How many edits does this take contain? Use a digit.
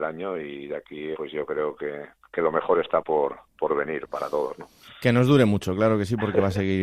1